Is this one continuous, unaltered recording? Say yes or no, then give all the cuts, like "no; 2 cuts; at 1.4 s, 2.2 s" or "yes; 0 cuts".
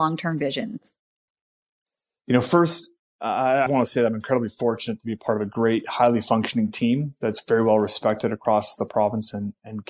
no; 1 cut; at 3.7 s